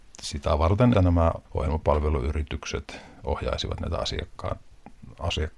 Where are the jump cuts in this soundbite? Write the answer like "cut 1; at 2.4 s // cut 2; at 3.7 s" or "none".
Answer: cut 1; at 0.9 s // cut 2; at 1.4 s